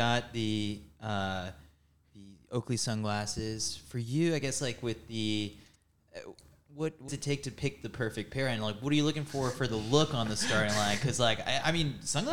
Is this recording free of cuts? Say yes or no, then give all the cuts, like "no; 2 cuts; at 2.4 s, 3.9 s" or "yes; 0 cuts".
no; 1 cut; at 7.1 s